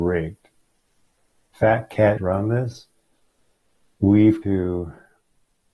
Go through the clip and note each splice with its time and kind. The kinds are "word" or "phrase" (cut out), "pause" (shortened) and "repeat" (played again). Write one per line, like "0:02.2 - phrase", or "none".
0:02.2 - word
0:04.4 - word